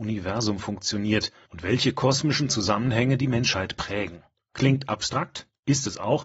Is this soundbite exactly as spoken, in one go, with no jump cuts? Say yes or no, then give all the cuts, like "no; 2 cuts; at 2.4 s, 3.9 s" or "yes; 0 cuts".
yes; 0 cuts